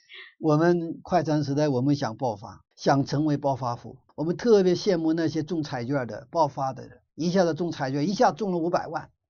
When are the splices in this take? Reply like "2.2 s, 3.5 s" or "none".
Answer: 2.7 s, 4.1 s, 7.1 s